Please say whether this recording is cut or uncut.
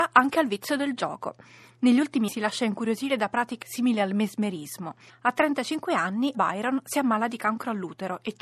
cut